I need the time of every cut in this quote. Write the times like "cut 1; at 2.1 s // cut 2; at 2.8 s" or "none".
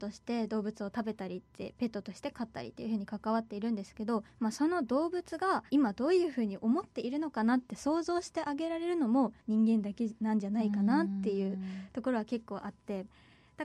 cut 1; at 4.3 s // cut 2; at 5.7 s // cut 3; at 9.4 s